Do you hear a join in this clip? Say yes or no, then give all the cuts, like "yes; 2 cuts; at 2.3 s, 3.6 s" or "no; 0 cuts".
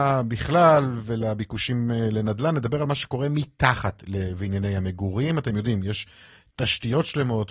no; 0 cuts